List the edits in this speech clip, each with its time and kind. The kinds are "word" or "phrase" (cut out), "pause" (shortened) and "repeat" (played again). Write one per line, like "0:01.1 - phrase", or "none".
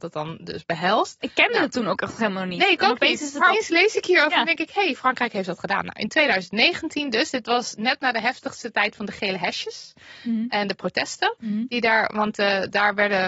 0:03.5 - word

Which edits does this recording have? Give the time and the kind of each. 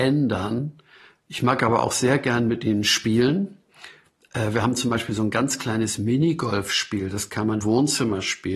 0:07.6 - word

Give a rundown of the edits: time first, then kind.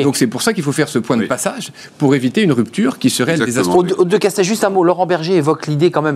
none

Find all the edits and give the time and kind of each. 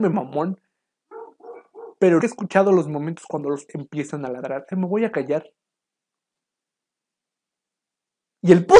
0:02.2 - word
0:03.7 - word
0:04.7 - word

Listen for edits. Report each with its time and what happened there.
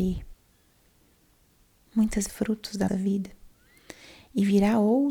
0:02.3 - phrase
0:02.9 - word

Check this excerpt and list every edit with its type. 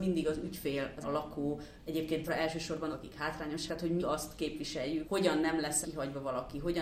0:01.0 - word
0:02.3 - word
0:02.9 - word
0:03.7 - word
0:04.0 - word
0:05.0 - word
0:05.8 - word

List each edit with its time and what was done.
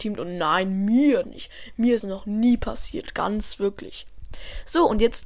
0:01.2 - word
0:02.0 - word

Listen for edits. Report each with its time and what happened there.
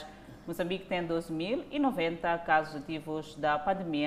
none

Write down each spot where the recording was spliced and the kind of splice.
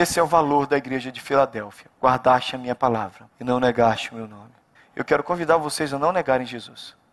0:01.9 - pause
0:03.3 - pause
0:04.8 - pause

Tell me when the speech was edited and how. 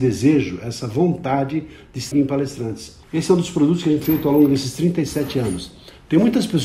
0:02.1 - word
0:03.0 - pause
0:04.0 - word

